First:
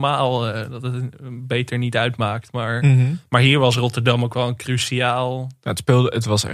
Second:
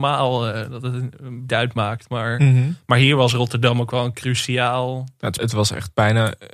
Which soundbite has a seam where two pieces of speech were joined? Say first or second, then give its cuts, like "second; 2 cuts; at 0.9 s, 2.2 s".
second; 2 cuts; at 1.5 s, 5.4 s